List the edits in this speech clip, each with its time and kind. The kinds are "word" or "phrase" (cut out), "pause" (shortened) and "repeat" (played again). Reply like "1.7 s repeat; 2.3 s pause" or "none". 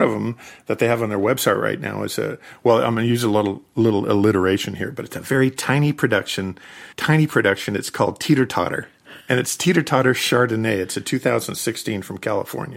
6.9 s pause; 9.2 s pause